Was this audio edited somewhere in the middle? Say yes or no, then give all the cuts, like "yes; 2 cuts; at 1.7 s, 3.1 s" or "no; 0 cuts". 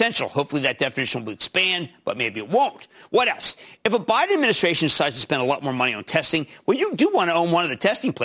no; 0 cuts